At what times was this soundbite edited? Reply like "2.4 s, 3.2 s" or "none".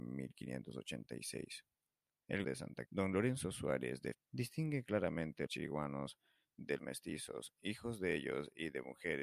2.4 s, 2.9 s, 4.1 s, 5.5 s, 6.8 s